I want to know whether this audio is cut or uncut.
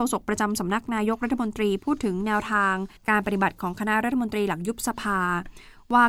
cut